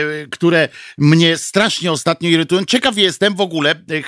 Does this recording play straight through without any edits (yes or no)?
yes